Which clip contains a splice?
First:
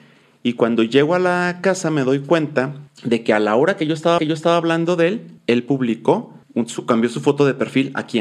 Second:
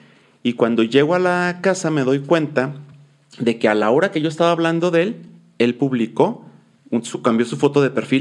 first; 4 cuts; at 2.9 s, 4.2 s, 5.4 s, 6.4 s

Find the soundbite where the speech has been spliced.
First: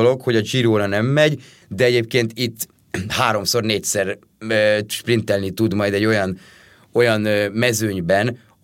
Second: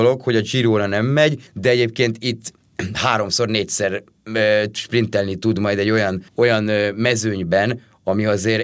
second; 2 cuts; at 1.5 s, 6.3 s

